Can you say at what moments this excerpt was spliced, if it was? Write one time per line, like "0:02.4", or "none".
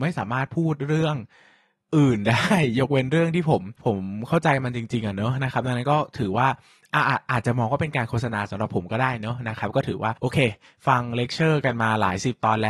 0:03.8